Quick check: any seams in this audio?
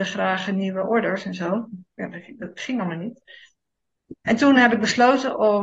no; 0 cuts

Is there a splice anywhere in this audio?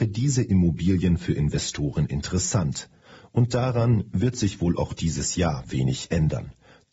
no; 0 cuts

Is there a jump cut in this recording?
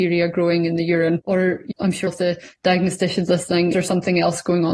yes; 3 cuts; at 1.7 s, 2.1 s, 3.7 s

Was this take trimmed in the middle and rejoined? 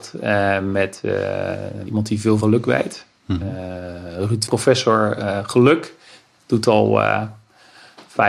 yes; 3 cuts; at 1.9 s, 2.4 s, 4.5 s

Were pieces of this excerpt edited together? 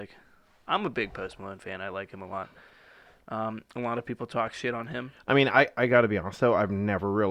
no; 0 cuts

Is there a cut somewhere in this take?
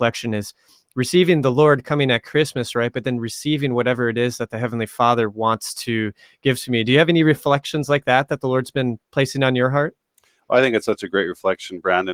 no; 0 cuts

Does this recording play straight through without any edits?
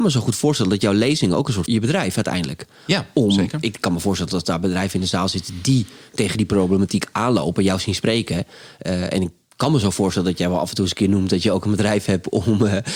no; 1 cut; at 1.7 s

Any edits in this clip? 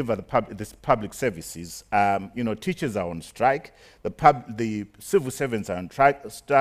no; 0 cuts

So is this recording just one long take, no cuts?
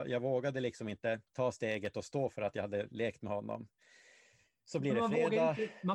no; 1 cut; at 1.3 s

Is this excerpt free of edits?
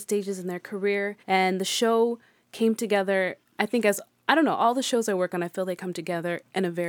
no; 1 cut; at 1.2 s

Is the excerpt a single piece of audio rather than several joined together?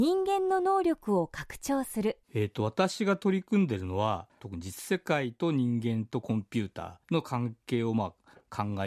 no; 3 cuts; at 2.2 s, 4.3 s, 7.0 s

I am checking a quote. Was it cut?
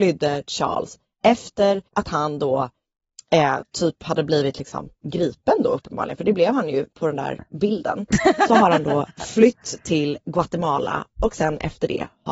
yes; 1 cut; at 1.9 s

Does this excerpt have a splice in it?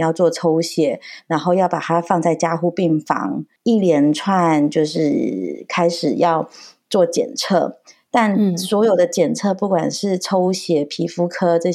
no; 0 cuts

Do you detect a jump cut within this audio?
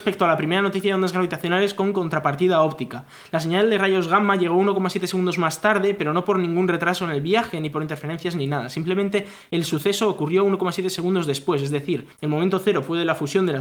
yes; 1 cut; at 12.1 s

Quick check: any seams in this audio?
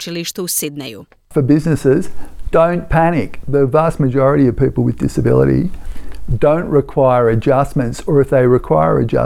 no; 0 cuts

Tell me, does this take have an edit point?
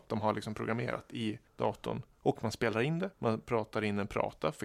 yes; 2 cuts; at 1.5 s, 3.1 s

